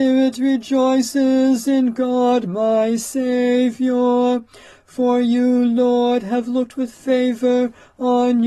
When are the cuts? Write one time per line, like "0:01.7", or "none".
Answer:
none